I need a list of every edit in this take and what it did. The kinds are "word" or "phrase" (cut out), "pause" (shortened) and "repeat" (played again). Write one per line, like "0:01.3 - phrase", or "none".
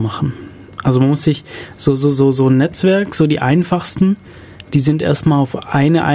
none